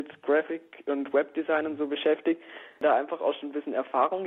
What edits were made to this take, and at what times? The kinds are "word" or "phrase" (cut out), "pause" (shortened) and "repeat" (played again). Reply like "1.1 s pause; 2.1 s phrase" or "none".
none